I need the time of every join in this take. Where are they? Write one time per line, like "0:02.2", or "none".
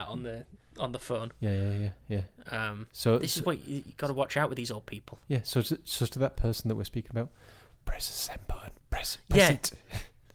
0:08.8